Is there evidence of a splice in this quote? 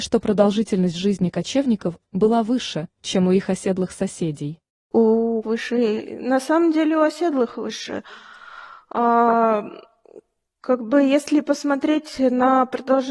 yes; 1 cut; at 5.4 s

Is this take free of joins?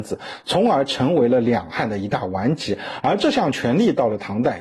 yes; 0 cuts

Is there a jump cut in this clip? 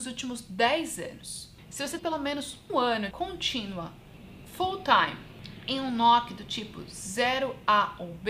yes; 3 cuts; at 2.0 s, 2.7 s, 3.1 s

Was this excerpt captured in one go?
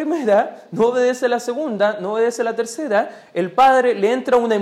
yes; 0 cuts

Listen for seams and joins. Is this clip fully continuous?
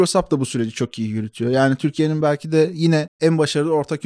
yes; 0 cuts

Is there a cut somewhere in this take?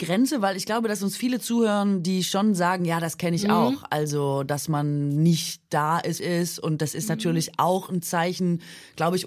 yes; 1 cut; at 6.2 s

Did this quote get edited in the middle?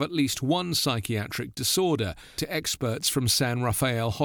yes; 1 cut; at 2.4 s

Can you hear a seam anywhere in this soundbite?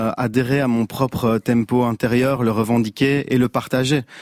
no; 0 cuts

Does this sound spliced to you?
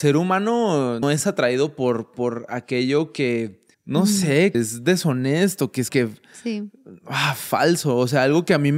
yes; 4 cuts; at 1.0 s, 3.7 s, 4.5 s, 5.9 s

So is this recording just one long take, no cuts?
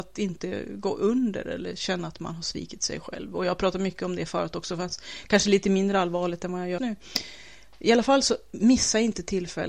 no; 1 cut; at 6.8 s

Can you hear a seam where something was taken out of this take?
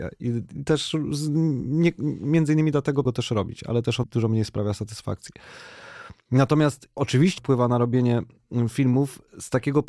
yes; 4 cuts; at 3.1 s, 4.0 s, 7.0 s, 7.4 s

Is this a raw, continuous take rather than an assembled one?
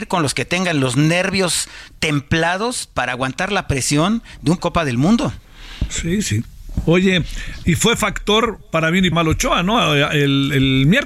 no; 3 cuts; at 4.6 s, 7.6 s, 9.1 s

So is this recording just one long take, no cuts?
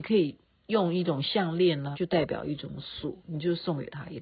no; 2 cuts; at 1.9 s, 3.2 s

